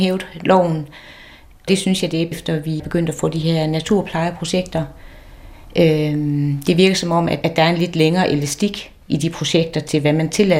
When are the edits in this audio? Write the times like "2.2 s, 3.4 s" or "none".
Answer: 1.7 s, 2.3 s, 2.8 s, 7.4 s, 9.0 s